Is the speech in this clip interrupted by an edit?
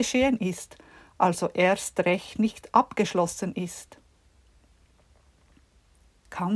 no; 0 cuts

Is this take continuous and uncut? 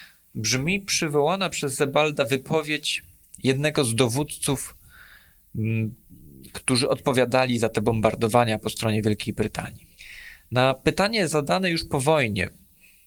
yes; 0 cuts

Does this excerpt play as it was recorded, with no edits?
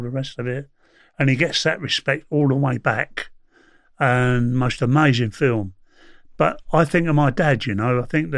yes; 0 cuts

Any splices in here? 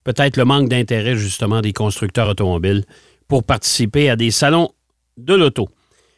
no; 0 cuts

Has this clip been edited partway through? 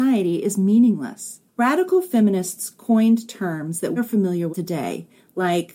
yes; 3 cuts; at 1.5 s, 4.0 s, 4.5 s

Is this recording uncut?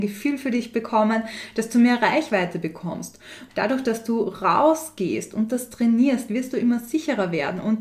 yes; 0 cuts

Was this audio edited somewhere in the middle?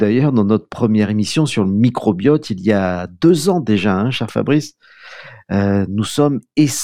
no; 0 cuts

